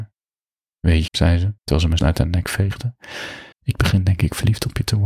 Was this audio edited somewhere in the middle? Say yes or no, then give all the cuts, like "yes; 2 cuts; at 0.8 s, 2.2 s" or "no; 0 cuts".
yes; 4 cuts; at 1.1 s, 1.6 s, 2.0 s, 3.5 s